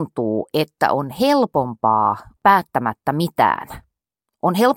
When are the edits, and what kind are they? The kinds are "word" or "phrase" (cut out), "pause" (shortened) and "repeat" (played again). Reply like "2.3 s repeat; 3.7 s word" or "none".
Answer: 2.4 s word